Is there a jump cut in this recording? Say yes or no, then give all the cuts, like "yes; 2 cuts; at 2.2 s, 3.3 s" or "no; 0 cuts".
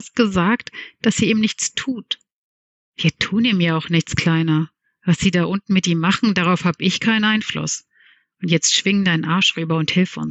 no; 0 cuts